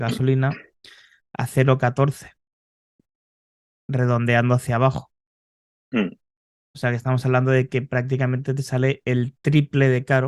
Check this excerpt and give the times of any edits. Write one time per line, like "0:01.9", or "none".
none